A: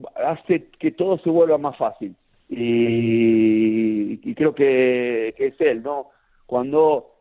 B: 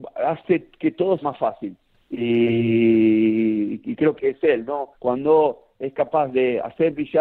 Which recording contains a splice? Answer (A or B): B